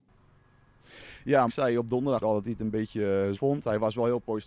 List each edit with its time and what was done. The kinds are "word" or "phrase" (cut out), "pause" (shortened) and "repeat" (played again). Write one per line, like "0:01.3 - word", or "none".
0:01.5 - word
0:02.2 - word
0:03.3 - word